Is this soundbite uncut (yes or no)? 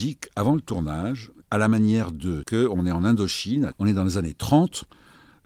no